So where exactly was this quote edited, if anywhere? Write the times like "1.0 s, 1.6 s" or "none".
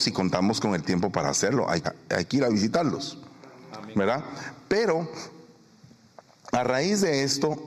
1.8 s